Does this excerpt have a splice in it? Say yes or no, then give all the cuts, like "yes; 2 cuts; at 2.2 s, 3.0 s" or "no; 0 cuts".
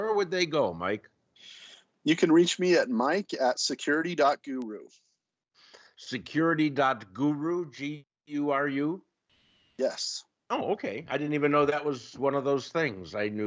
no; 0 cuts